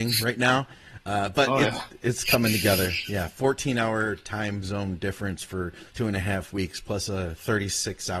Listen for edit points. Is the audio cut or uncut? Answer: cut